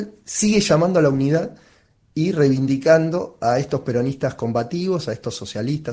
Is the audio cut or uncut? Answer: uncut